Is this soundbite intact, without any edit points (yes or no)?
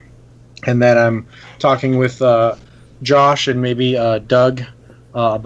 yes